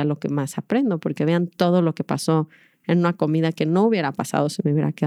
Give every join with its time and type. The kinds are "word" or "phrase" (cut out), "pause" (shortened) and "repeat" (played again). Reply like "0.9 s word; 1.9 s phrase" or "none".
none